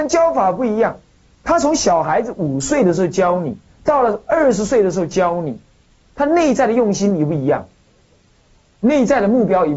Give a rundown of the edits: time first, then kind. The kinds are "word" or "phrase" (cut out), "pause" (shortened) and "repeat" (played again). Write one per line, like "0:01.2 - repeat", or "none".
none